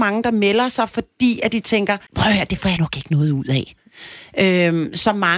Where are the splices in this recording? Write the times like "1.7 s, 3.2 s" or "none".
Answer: 2.1 s, 2.8 s